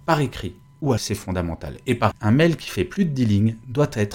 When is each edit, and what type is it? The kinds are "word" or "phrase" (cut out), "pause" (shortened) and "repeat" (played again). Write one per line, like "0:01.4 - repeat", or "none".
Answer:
0:01.0 - word
0:02.1 - phrase